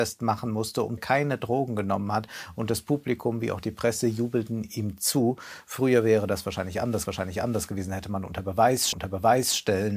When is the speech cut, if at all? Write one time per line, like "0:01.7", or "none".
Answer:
0:01.0
0:07.1
0:08.9